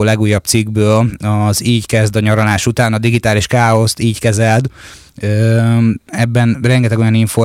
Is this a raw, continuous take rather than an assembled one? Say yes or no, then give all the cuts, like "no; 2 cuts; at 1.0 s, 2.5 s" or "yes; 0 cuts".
no; 1 cut; at 6.1 s